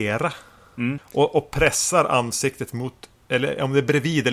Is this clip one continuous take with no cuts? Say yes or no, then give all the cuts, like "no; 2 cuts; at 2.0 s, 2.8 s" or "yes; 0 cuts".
yes; 0 cuts